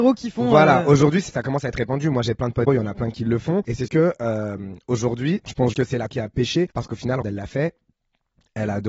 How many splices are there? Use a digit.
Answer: 6